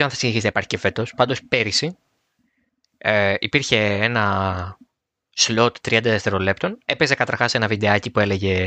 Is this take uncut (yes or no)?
yes